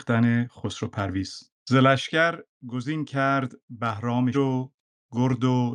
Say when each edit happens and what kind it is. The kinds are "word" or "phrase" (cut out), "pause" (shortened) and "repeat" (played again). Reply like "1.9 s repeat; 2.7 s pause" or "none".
1.6 s pause; 4.3 s phrase